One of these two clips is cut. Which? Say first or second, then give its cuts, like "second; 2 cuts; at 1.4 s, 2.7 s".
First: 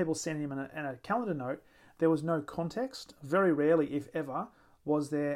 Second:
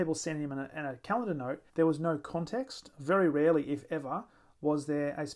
second; 1 cut; at 1.7 s